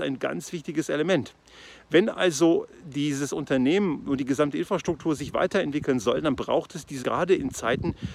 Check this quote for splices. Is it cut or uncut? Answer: cut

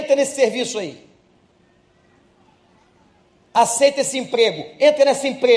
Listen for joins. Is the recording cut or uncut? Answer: uncut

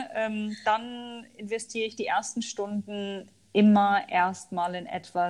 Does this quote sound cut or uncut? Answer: uncut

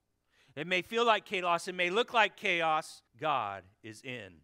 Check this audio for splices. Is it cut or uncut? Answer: cut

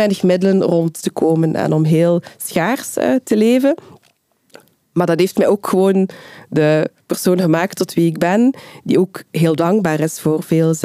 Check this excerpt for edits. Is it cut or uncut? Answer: uncut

